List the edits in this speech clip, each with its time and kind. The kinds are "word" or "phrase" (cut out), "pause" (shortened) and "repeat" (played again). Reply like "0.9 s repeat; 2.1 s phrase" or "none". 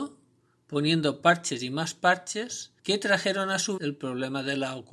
2.8 s pause; 3.8 s word